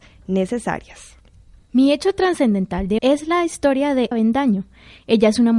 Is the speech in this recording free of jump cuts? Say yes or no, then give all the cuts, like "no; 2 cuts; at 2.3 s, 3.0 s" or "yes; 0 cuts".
no; 2 cuts; at 3.0 s, 4.1 s